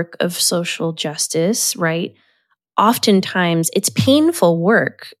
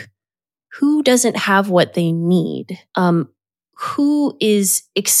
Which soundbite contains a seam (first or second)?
second